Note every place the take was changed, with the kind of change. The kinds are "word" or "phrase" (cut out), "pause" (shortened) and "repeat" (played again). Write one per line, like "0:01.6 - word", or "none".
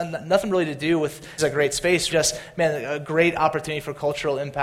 0:01.4 - word
0:02.1 - word